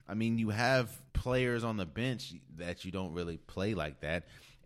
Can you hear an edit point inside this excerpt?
yes; 1 cut; at 1.1 s

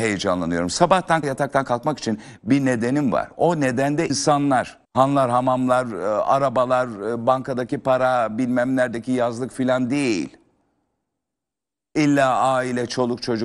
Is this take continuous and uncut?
no; 3 cuts; at 1.2 s, 4.1 s, 4.8 s

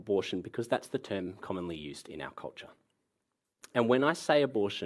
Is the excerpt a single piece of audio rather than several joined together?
yes; 0 cuts

